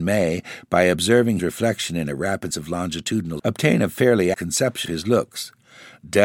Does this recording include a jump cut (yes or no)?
yes